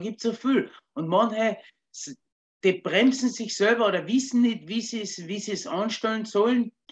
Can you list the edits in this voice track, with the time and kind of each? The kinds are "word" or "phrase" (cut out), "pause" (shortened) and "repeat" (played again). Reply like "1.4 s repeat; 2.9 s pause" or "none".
none